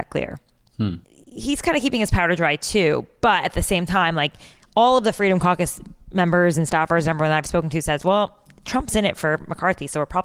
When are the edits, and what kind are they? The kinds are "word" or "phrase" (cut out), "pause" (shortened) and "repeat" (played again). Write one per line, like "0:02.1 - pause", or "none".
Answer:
none

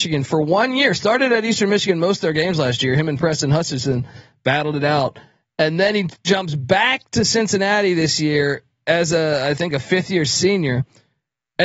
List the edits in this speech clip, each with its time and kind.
none

